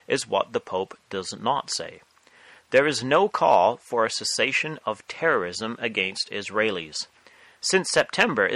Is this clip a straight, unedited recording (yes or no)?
yes